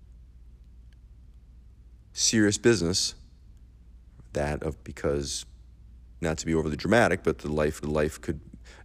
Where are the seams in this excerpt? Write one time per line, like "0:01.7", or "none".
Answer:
0:04.8
0:06.2
0:07.8